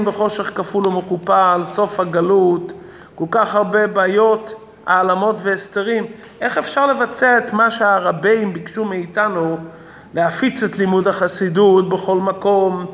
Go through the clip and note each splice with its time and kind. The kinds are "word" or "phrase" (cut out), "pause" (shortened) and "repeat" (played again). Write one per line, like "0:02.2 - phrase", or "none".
none